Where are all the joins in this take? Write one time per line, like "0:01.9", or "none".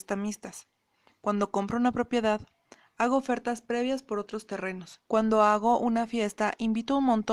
0:05.0